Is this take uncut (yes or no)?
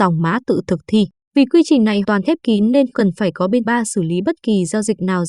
no